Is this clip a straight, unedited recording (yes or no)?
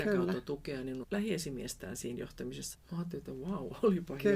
no